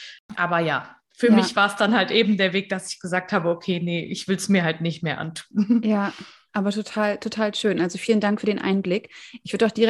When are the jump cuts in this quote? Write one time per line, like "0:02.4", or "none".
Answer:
none